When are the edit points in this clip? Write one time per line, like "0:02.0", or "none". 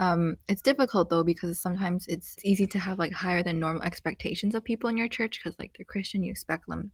none